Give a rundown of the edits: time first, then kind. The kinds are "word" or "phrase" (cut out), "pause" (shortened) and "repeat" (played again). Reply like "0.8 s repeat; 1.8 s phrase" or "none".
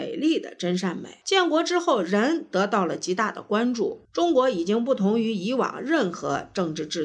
1.2 s pause; 4.0 s pause